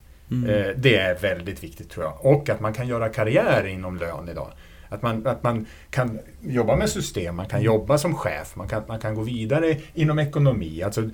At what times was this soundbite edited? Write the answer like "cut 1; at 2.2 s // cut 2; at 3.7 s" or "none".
none